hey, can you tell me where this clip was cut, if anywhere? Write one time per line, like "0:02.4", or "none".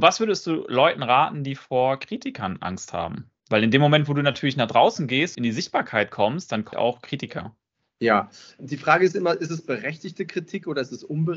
0:05.3
0:06.7
0:08.6